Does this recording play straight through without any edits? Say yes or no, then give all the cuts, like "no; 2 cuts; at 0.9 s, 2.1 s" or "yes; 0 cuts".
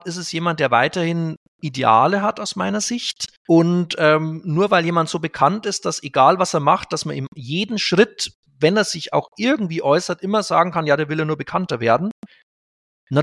no; 1 cut; at 3.4 s